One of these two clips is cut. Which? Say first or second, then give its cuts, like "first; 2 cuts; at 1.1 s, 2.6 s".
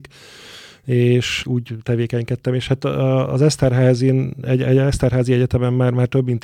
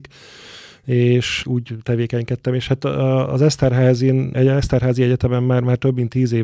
second; 1 cut; at 4.3 s